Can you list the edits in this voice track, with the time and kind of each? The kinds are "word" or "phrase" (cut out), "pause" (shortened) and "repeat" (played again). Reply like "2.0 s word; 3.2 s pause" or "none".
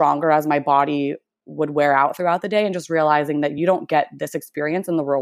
none